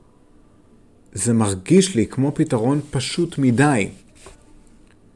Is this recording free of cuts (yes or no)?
yes